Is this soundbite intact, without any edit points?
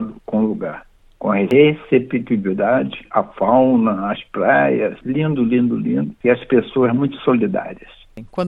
yes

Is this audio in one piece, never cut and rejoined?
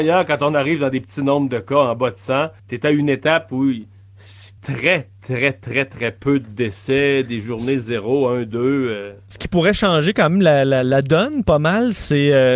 no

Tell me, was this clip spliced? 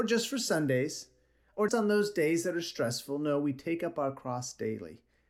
yes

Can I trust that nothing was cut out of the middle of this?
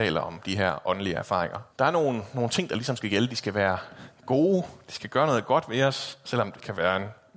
no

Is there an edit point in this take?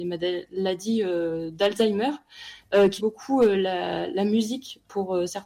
yes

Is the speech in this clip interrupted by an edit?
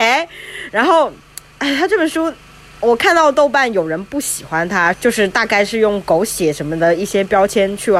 yes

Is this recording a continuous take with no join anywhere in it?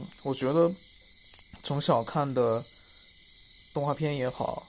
no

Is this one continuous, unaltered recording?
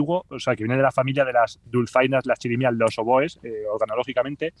yes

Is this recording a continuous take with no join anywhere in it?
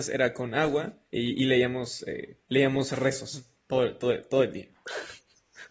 no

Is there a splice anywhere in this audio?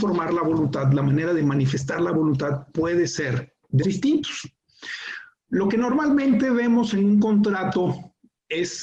yes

